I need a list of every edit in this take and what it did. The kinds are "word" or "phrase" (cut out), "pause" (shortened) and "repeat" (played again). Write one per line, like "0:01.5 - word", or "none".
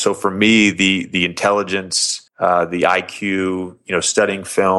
0:02.3 - pause